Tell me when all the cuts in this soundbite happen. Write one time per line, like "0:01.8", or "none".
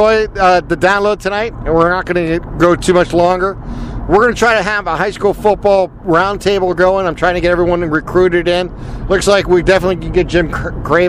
none